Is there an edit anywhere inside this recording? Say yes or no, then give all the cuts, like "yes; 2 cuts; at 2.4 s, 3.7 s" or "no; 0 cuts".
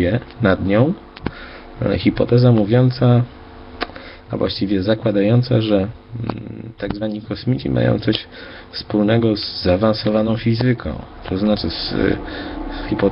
no; 0 cuts